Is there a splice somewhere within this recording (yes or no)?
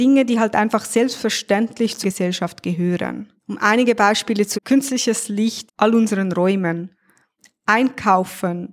yes